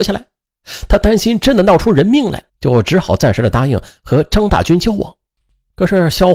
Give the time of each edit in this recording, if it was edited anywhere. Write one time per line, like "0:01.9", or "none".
0:02.5